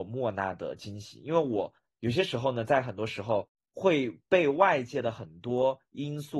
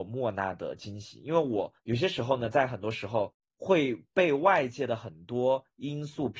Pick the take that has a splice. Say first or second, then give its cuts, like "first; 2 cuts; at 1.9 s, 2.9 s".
second; 1 cut; at 1.8 s